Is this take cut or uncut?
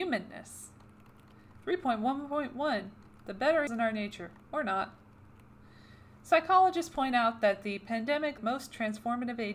cut